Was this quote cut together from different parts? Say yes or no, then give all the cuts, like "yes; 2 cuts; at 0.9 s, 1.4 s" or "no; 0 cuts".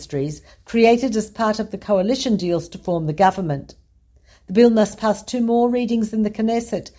no; 0 cuts